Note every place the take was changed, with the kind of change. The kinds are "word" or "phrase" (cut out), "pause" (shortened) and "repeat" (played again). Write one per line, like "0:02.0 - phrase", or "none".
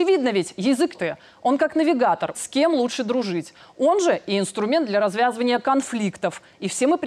0:00.9 - phrase
0:02.3 - word